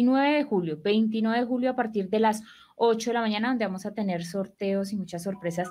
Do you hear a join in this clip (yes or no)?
no